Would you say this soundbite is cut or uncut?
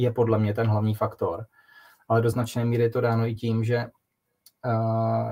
uncut